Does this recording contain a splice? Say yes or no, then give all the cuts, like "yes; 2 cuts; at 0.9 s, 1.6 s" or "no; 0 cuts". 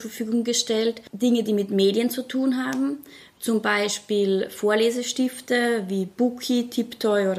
no; 0 cuts